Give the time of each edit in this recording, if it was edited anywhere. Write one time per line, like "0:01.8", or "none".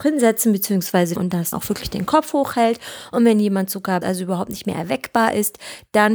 0:01.2
0:01.5
0:04.0